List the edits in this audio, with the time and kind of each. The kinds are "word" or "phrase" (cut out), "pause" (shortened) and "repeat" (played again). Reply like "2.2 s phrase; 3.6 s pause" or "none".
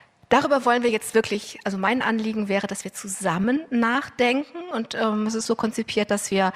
5.4 s word